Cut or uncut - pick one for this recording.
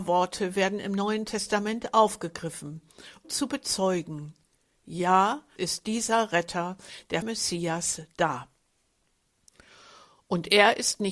cut